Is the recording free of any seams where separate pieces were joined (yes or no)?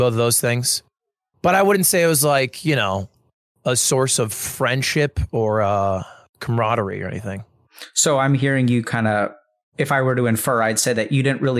yes